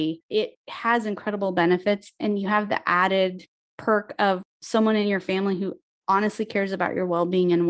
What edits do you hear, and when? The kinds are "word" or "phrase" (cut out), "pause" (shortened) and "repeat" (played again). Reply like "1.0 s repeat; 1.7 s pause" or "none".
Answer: none